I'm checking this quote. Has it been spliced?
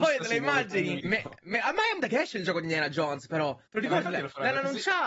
yes; 3 cuts; at 1.0 s, 2.0 s, 3.7 s

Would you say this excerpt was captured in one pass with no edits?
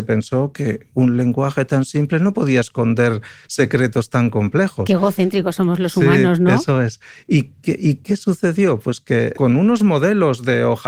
no; 1 cut; at 9.3 s

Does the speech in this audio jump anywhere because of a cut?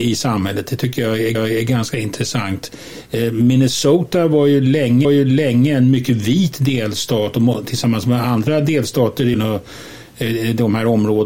yes; 3 cuts; at 1.3 s, 5.0 s, 9.3 s

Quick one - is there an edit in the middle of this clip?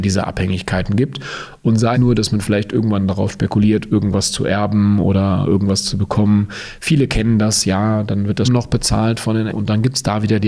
yes; 3 cuts; at 1.9 s, 8.4 s, 9.5 s

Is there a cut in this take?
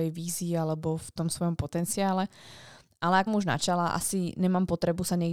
yes; 2 cuts; at 1.6 s, 3.3 s

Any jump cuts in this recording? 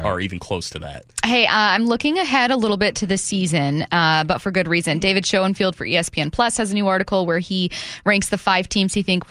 no; 0 cuts

